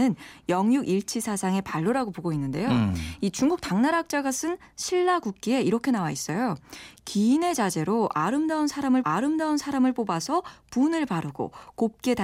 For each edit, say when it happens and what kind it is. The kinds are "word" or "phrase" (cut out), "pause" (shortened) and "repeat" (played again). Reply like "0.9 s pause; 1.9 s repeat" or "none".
9.0 s repeat